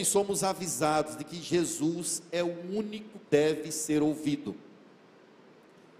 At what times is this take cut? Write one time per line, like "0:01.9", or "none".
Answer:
0:03.2